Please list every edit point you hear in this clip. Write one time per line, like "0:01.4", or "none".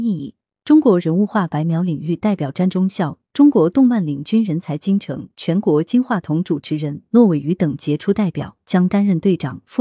none